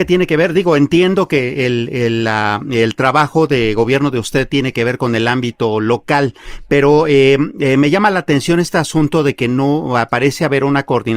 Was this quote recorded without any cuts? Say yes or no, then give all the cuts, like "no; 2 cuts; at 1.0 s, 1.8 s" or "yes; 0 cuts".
yes; 0 cuts